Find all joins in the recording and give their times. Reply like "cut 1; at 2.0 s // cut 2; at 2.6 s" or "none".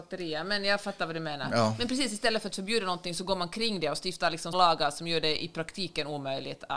cut 1; at 4.5 s

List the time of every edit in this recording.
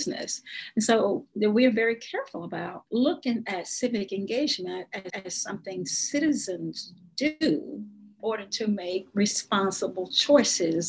cut 1; at 2.9 s // cut 2; at 5.1 s // cut 3; at 8.2 s

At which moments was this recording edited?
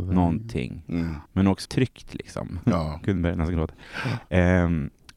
cut 1; at 1.3 s // cut 2; at 1.6 s

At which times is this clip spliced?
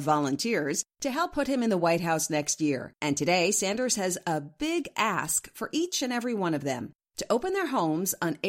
cut 1; at 3.0 s

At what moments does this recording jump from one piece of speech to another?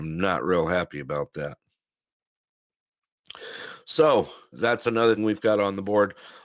cut 1; at 4.5 s // cut 2; at 5.2 s

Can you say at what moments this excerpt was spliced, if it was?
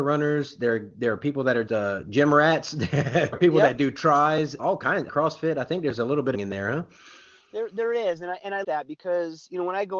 cut 1; at 1.7 s // cut 2; at 3.3 s // cut 3; at 4.6 s // cut 4; at 5.1 s // cut 5; at 6.3 s // cut 6; at 8.6 s

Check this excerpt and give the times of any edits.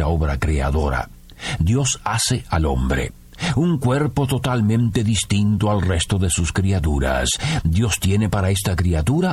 none

